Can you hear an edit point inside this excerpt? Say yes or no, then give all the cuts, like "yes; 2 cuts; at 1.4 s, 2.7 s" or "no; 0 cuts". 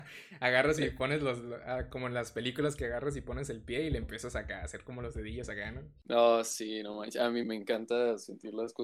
yes; 1 cut; at 7.4 s